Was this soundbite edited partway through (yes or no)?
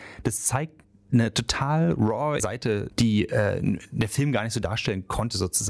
yes